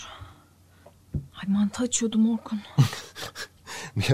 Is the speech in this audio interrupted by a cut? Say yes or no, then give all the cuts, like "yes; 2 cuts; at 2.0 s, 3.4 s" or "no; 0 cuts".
no; 0 cuts